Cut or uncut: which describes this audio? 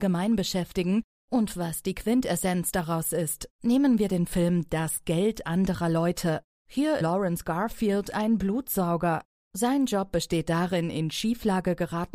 cut